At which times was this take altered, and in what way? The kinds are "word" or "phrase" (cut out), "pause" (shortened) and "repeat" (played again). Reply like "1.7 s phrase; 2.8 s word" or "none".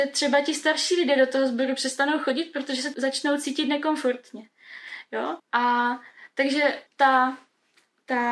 2.9 s word; 5.4 s pause; 6.9 s pause